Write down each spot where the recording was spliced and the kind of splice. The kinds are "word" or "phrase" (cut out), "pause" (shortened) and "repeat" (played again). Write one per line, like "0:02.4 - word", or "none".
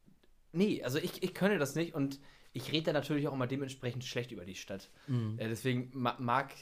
none

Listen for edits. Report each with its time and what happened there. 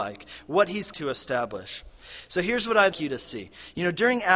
0:00.9 - word
0:02.9 - word

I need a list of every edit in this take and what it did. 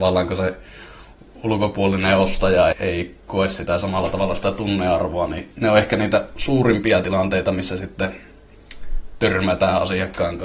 0:02.7 - word

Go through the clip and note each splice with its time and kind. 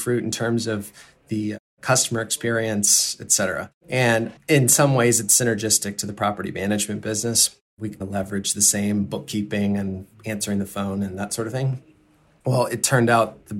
0:03.8 - pause
0:08.0 - word

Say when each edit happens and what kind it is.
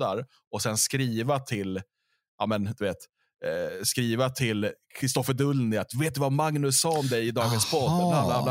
none

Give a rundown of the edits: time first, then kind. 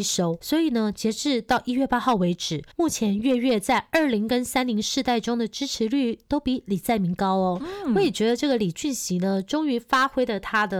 0:02.7 - pause

